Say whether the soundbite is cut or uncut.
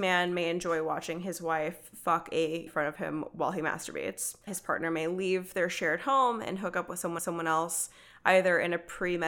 cut